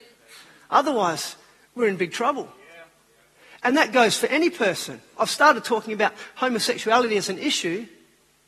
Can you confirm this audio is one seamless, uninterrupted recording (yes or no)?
yes